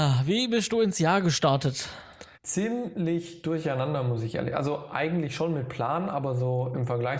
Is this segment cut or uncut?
cut